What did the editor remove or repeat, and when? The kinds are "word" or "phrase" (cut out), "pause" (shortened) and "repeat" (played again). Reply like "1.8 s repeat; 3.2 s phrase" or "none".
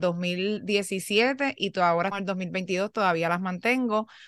2.1 s word